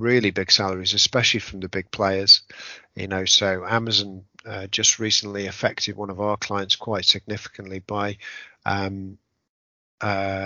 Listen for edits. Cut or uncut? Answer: uncut